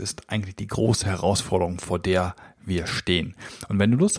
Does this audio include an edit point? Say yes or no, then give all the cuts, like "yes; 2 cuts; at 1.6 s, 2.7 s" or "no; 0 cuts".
no; 0 cuts